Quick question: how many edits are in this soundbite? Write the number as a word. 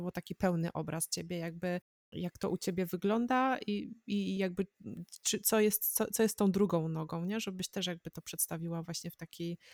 zero